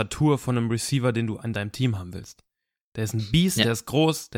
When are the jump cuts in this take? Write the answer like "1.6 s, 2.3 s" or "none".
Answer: none